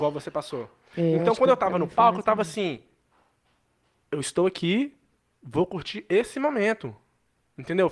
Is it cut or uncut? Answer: uncut